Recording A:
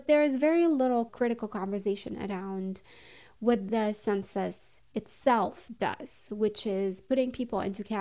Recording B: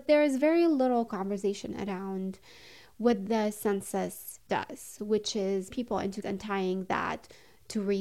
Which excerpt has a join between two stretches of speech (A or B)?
B